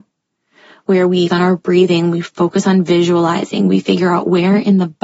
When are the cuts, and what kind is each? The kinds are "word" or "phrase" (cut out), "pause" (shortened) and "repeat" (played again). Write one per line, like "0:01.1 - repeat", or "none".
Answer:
0:01.3 - word